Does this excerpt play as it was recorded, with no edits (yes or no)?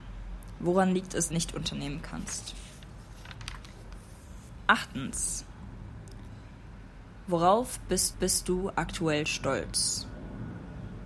no